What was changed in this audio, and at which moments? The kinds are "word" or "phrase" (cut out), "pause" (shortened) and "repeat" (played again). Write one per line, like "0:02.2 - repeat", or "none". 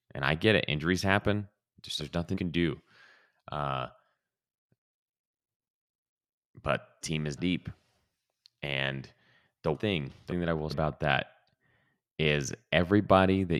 0:02.0 - word
0:02.3 - word
0:07.0 - word
0:07.4 - word
0:09.7 - word
0:10.3 - word
0:10.7 - word